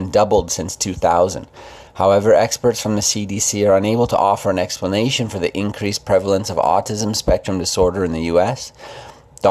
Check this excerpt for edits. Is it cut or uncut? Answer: uncut